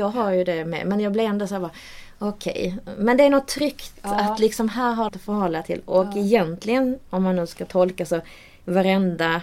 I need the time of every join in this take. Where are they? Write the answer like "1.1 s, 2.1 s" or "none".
5.1 s